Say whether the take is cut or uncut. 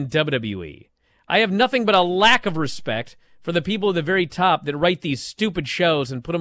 uncut